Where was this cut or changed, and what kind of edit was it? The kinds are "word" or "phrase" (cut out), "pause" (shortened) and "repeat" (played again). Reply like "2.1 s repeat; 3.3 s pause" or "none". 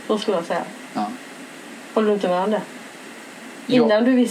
none